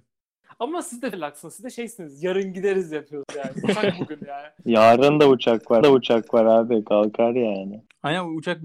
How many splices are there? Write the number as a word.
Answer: two